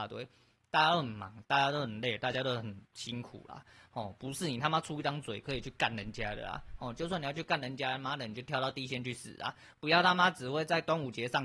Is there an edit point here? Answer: no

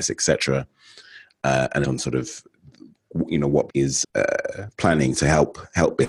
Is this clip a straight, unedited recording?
no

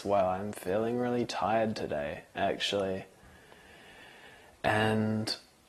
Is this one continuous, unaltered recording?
yes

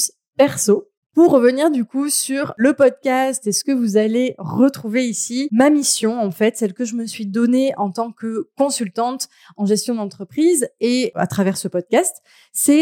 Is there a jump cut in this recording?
no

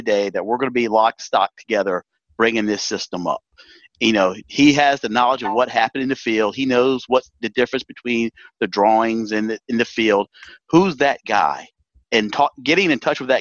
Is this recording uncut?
yes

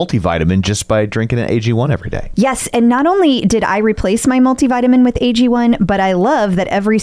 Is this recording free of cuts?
yes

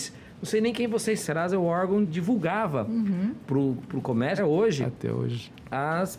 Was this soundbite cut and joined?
yes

